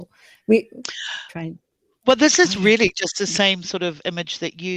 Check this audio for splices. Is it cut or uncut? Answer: uncut